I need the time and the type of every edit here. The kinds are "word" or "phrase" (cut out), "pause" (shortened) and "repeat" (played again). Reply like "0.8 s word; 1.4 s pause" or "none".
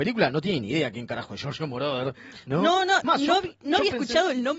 3.0 s word